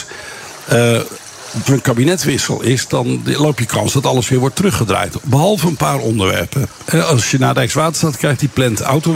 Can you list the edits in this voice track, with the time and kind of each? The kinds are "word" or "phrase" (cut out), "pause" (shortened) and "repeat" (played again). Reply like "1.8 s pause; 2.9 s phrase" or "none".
1.7 s word